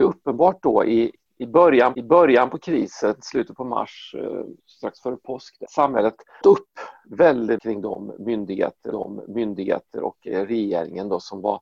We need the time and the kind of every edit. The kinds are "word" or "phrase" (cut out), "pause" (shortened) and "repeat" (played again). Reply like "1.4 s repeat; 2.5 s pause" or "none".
1.9 s repeat; 4.6 s pause; 5.7 s word; 6.4 s word; 7.6 s word; 8.9 s repeat